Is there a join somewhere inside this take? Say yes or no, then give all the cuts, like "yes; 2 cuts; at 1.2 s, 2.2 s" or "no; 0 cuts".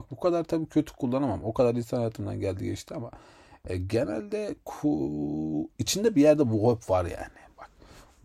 no; 0 cuts